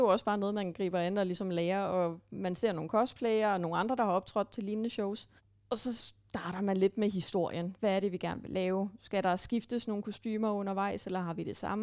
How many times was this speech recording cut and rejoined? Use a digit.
1